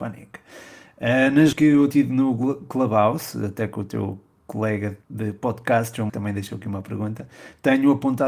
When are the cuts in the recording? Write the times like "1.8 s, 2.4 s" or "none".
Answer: 1.5 s, 1.9 s, 5.0 s, 6.1 s

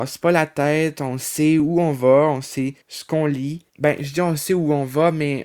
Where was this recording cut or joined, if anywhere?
2.8 s, 3.7 s

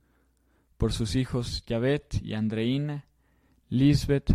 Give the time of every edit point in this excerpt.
none

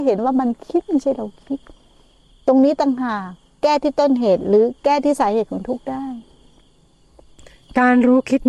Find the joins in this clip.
none

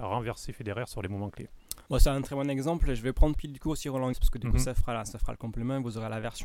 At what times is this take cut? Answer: 1.9 s, 3.3 s, 4.1 s

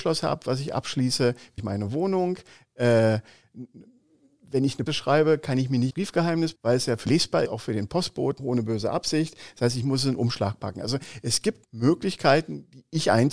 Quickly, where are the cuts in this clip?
1.6 s, 4.9 s, 5.9 s, 6.6 s, 7.1 s, 7.5 s, 8.4 s, 11.6 s

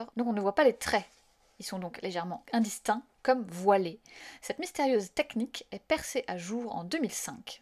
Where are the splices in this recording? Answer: none

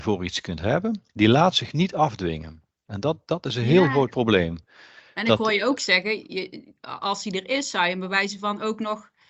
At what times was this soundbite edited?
1.1 s

